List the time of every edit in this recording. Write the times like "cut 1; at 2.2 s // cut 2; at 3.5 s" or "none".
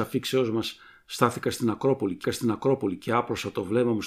cut 1; at 2.2 s